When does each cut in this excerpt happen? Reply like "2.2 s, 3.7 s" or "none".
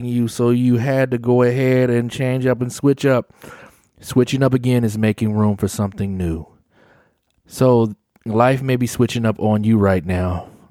none